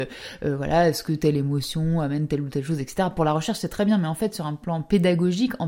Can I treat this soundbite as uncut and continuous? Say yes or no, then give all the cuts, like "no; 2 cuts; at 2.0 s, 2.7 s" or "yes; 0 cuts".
yes; 0 cuts